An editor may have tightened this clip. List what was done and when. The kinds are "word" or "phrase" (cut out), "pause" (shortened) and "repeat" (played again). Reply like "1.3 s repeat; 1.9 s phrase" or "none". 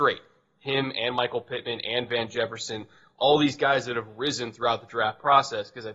none